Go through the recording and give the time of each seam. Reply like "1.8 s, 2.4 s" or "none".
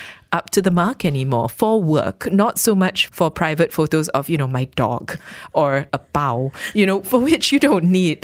3.1 s, 5.9 s

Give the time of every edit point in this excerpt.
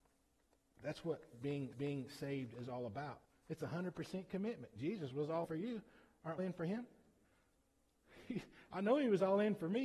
1.7 s, 3.2 s, 5.4 s, 6.4 s, 7.2 s

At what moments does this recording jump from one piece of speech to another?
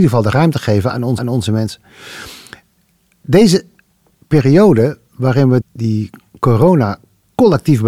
1.2 s, 5.6 s

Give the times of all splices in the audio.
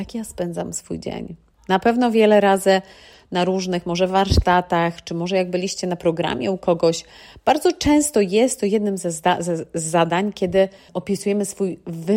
10.9 s

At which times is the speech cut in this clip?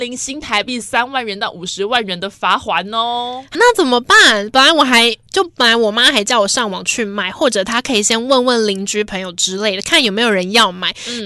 3.5 s

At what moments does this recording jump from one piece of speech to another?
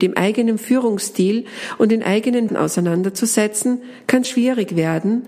2.5 s, 4.2 s

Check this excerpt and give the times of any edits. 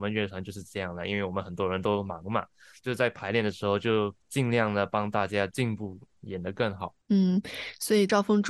4.2 s, 7.0 s

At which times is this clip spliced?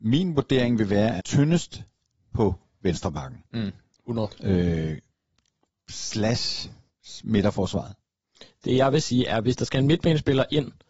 1.2 s

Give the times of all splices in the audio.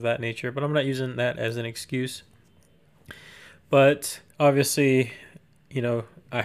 4.3 s

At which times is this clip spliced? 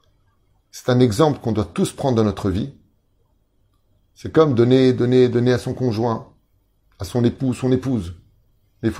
none

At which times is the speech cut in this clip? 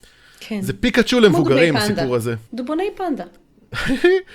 2.5 s

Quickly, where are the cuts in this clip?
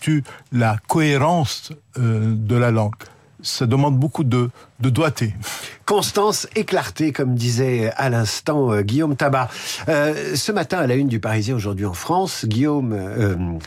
none

